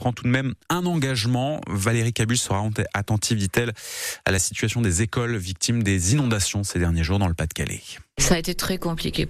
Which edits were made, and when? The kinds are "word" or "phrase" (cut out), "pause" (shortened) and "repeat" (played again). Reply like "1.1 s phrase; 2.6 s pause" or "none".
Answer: none